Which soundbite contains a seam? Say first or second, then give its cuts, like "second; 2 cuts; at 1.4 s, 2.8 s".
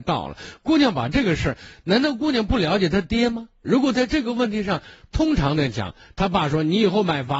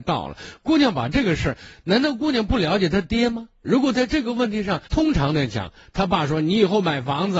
second; 1 cut; at 4.9 s